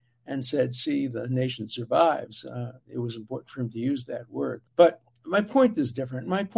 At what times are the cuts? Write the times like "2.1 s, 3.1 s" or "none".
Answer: 4.7 s

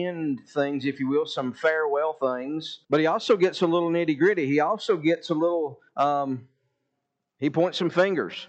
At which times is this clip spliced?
2.8 s, 5.9 s

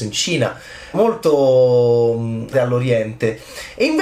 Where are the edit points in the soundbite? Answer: 0.9 s, 2.5 s

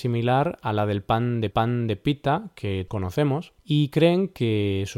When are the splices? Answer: 1.5 s, 2.9 s, 3.6 s

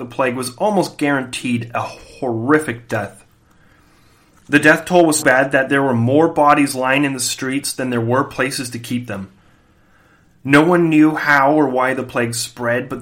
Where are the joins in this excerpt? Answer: 5.2 s

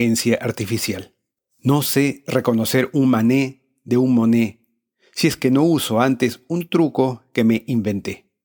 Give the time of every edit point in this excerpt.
1.4 s

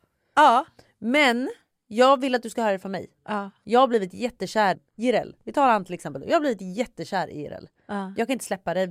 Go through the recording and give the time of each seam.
4.7 s

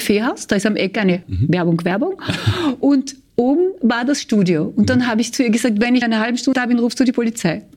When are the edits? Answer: 1.2 s, 6.0 s, 6.5 s

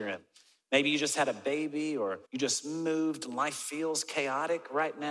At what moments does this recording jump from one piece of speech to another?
2.3 s

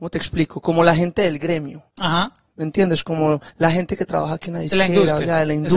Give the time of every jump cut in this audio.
1.9 s, 3.5 s

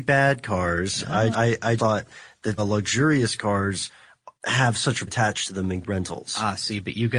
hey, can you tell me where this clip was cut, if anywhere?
1.3 s, 1.8 s, 2.6 s, 4.4 s, 5.1 s, 5.8 s

